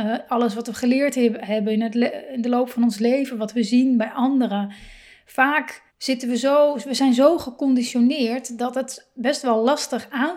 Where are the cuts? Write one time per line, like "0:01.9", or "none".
0:05.9